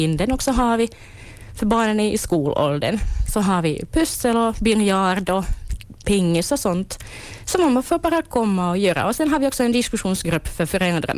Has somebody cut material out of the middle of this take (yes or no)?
no